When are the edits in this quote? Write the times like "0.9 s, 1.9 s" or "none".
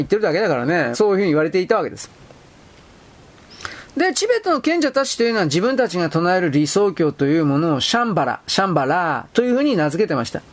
0.9 s

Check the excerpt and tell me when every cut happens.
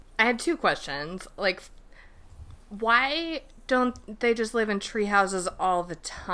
none

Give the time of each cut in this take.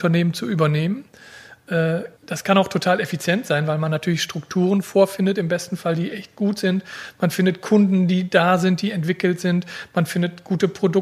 2.2 s

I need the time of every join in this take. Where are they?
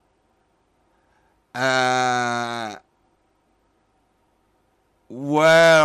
none

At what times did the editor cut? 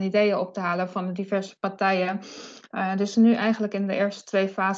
3.1 s

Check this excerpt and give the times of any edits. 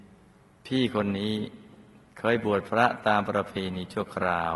2.1 s

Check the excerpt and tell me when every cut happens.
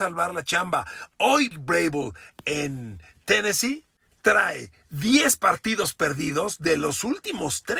1.5 s

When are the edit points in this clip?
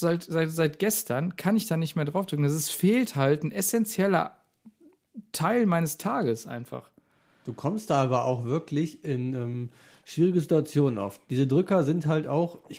none

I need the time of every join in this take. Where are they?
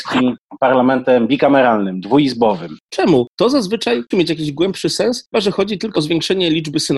4.1 s, 5.3 s, 5.9 s

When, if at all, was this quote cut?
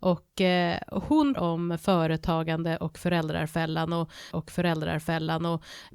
1.4 s, 4.3 s

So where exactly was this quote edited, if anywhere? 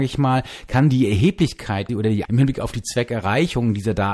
1.9 s, 2.2 s

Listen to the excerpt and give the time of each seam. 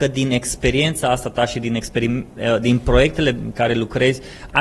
none

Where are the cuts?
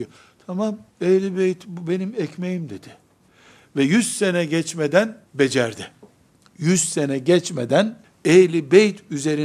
0.9 s, 3.3 s, 5.3 s, 8.0 s

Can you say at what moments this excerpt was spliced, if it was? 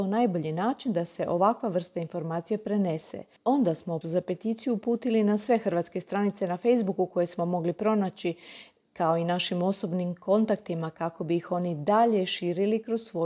4.0 s

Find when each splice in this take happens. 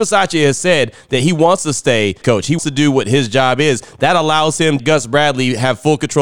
2.2 s, 2.6 s, 4.8 s

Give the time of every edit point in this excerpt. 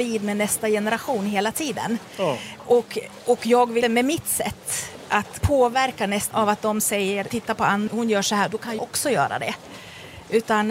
3.8 s, 5.4 s, 6.3 s, 7.3 s, 7.9 s, 8.8 s

